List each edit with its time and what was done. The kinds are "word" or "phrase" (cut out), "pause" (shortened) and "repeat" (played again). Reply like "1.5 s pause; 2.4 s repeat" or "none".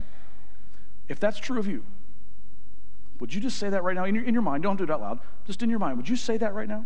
none